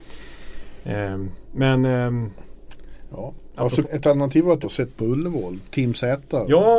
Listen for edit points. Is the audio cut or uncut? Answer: cut